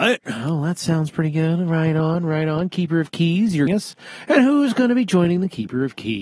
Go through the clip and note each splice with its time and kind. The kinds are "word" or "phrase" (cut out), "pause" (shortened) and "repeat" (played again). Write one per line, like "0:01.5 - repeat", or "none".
0:03.7 - phrase